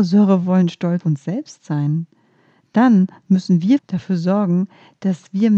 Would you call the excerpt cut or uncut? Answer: cut